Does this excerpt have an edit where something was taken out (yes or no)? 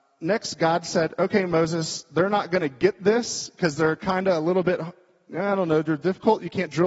no